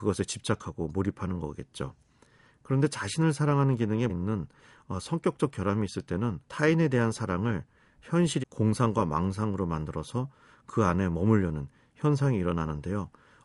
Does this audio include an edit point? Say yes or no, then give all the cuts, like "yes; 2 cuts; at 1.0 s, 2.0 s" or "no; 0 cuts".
yes; 3 cuts; at 4.1 s, 6.4 s, 8.4 s